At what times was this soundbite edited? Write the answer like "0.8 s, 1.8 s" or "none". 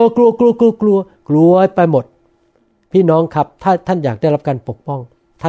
none